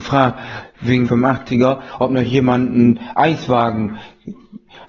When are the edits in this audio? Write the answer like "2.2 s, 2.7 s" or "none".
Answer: 1.0 s